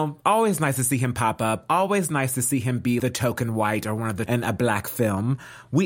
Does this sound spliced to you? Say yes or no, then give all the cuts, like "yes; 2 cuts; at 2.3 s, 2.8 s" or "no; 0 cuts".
yes; 2 cuts; at 3.0 s, 4.3 s